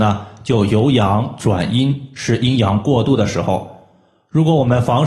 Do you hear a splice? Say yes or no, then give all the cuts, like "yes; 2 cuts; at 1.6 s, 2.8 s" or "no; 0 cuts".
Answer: no; 0 cuts